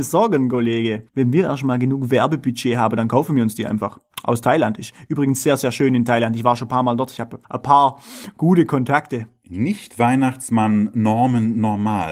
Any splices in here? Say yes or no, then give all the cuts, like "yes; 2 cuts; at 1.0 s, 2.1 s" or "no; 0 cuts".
yes; 2 cuts; at 1.1 s, 7.4 s